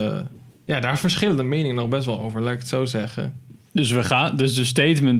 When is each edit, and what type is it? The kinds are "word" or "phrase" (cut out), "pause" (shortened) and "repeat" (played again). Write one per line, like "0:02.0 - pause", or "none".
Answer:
0:03.6 - pause